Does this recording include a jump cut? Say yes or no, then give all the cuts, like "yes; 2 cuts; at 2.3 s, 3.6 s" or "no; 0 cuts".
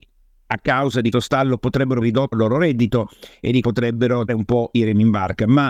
yes; 5 cuts; at 1.1 s, 2.0 s, 2.3 s, 3.6 s, 4.3 s